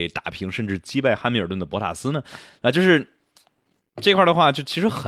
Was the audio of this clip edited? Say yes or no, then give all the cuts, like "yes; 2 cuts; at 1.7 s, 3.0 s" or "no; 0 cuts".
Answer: no; 0 cuts